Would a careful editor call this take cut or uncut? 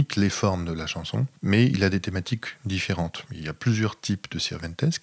cut